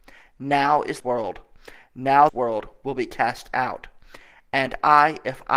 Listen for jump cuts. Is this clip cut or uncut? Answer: cut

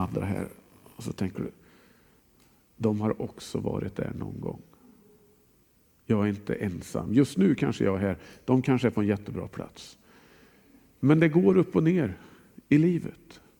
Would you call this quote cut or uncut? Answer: uncut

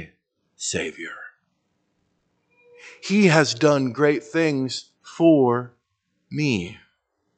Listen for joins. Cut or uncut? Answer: uncut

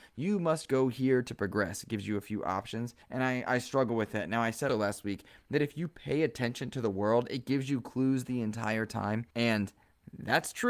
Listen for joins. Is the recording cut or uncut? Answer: cut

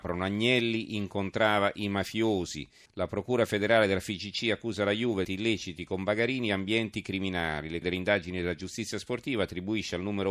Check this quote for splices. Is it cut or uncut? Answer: cut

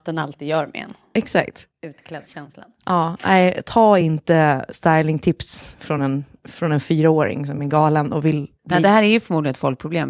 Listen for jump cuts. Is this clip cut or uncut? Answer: uncut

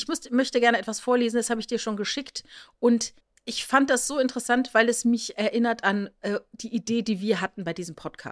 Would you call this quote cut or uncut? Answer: cut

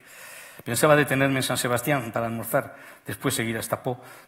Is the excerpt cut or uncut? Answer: uncut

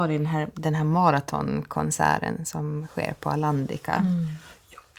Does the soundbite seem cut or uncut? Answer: uncut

